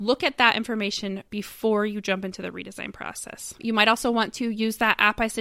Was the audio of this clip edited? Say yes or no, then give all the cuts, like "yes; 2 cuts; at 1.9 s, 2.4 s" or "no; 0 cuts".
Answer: yes; 1 cut; at 1.3 s